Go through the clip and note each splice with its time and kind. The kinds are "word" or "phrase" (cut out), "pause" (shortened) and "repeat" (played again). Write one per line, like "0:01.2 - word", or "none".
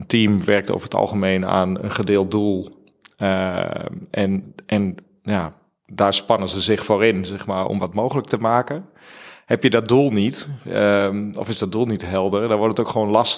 0:07.7 - word